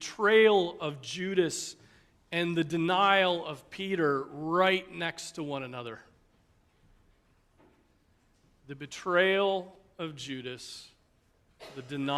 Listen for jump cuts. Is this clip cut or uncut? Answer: uncut